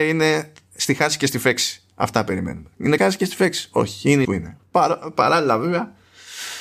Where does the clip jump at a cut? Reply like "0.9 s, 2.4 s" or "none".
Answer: 3.0 s, 4.2 s